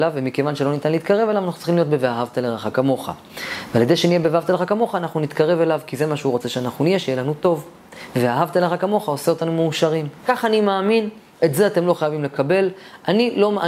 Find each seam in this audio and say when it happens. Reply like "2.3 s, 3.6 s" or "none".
10.2 s